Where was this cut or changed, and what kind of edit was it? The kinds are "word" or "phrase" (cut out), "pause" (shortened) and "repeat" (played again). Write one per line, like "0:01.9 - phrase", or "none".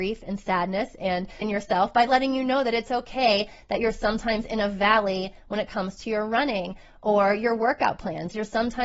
0:01.4 - word